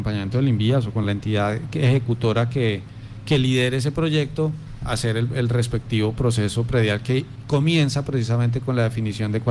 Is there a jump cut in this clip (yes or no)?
no